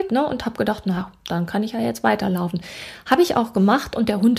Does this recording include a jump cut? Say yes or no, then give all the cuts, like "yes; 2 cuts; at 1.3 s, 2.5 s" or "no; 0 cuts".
no; 0 cuts